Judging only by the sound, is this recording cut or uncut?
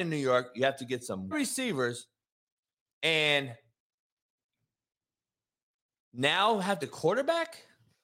cut